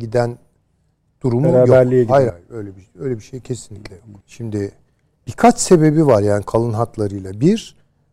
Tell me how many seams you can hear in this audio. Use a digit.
2